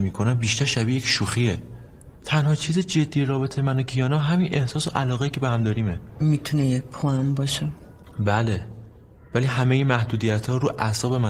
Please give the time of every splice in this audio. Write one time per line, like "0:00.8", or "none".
none